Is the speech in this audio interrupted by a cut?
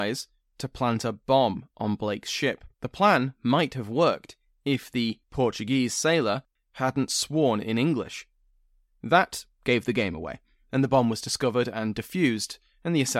yes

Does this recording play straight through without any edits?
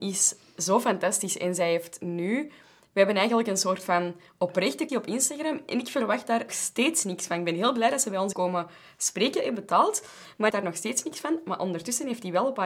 no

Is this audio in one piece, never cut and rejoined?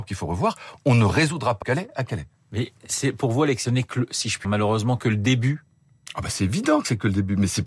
no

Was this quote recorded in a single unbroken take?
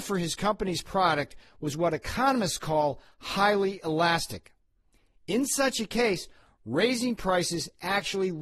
yes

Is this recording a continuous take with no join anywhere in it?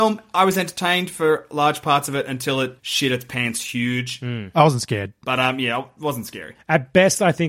no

